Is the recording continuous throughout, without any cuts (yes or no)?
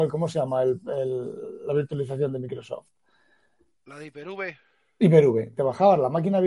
yes